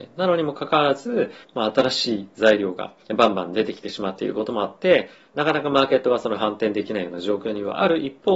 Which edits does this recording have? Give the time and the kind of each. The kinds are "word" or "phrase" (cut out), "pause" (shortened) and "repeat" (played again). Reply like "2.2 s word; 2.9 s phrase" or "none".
1.4 s pause; 3.0 s pause